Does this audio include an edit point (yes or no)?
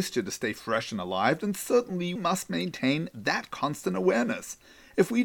yes